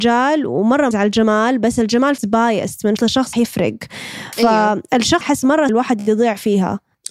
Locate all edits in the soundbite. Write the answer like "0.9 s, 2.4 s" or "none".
0.9 s, 2.2 s, 3.0 s, 3.3 s, 5.2 s, 5.7 s